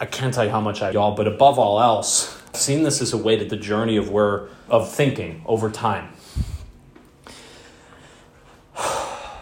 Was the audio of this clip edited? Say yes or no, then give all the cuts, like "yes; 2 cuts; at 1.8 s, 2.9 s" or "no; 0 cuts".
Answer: yes; 4 cuts; at 0.9 s, 2.5 s, 3.5 s, 4.7 s